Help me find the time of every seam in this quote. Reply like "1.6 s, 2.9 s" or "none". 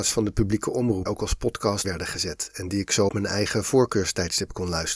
1.1 s, 1.8 s, 3.1 s